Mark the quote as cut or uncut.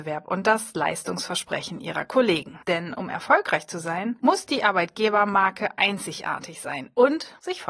cut